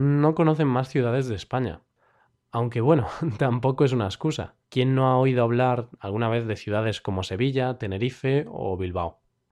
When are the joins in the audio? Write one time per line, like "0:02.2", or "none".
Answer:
0:04.6

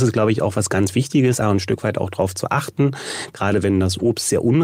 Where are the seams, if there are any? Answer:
0:01.4

